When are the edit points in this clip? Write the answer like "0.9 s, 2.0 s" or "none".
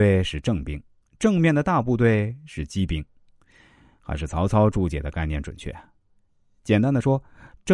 none